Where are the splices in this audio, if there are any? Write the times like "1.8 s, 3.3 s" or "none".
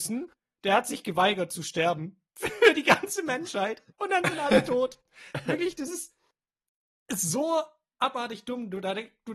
2.3 s, 3.9 s, 5.0 s